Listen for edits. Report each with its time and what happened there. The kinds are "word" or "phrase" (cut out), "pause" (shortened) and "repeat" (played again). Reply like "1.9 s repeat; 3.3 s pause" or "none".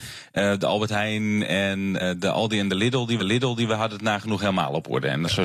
2.0 s word; 3.2 s repeat